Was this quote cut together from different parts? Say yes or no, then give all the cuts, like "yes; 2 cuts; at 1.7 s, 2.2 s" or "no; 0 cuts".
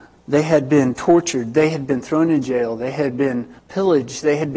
yes; 1 cut; at 3.6 s